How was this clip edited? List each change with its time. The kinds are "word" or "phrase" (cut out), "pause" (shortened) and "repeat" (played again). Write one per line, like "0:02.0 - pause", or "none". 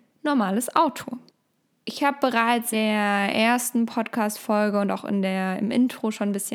0:02.7 - word